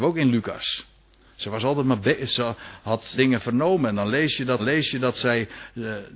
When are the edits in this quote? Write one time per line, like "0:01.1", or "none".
0:03.2
0:04.6

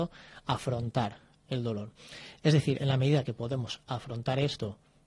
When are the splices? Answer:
none

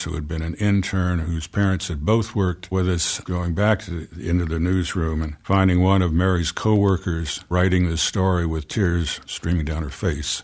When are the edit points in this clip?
none

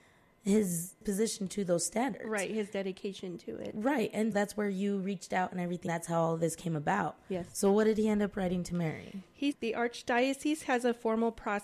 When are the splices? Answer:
0:01.0
0:04.3
0:05.9
0:09.5

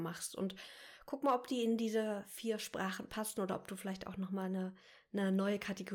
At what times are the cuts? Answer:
none

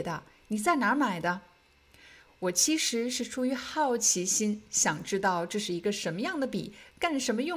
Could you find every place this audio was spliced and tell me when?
none

